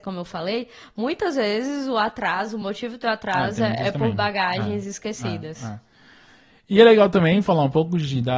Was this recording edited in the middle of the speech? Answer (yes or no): no